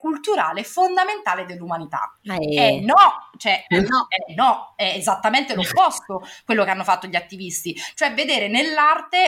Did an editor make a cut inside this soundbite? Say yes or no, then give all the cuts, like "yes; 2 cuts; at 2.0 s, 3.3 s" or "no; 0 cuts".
no; 0 cuts